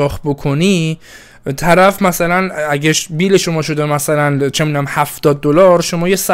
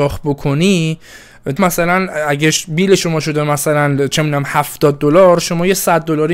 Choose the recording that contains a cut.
second; 1 cut; at 1.6 s

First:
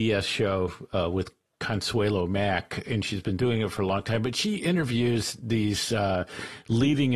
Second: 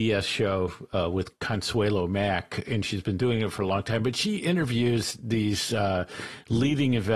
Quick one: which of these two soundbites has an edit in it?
second; 1 cut; at 1.4 s

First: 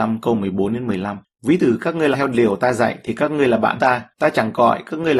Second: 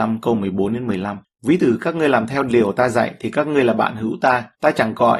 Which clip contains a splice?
first; 2 cuts; at 2.1 s, 3.8 s

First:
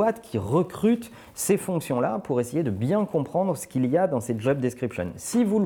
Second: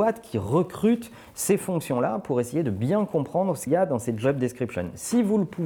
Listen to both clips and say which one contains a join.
second; 1 cut; at 3.7 s

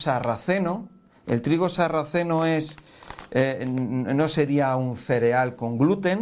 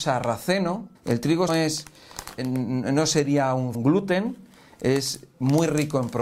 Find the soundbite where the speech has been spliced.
second; 4 cuts; at 1.0 s, 1.5 s, 2.4 s, 3.7 s

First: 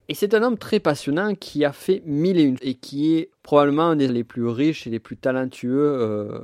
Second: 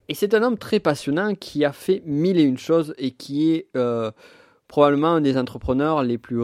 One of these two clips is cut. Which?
first; 3 cuts; at 2.6 s, 3.3 s, 4.1 s

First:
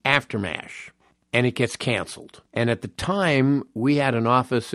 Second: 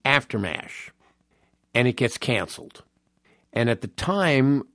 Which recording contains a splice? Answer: first; 2 cuts; at 1.1 s, 2.5 s

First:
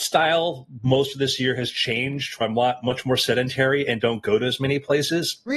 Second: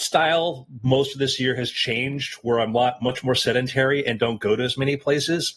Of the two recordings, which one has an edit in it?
first; 1 cut; at 2.4 s

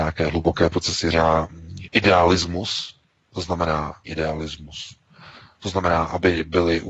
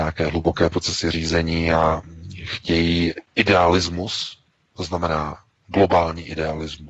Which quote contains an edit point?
first; 3 cuts; at 1.1 s, 1.8 s, 4.0 s

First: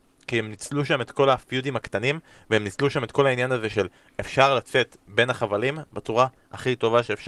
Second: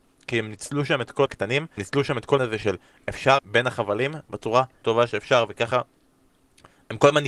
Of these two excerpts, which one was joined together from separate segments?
second; 5 cuts; at 1.3 s, 1.8 s, 2.4 s, 3.4 s, 4.8 s

